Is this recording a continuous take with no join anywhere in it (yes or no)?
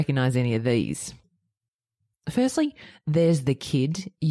yes